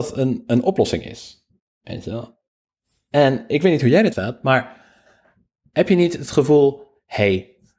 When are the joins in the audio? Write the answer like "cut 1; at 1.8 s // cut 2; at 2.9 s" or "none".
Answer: cut 1; at 4.1 s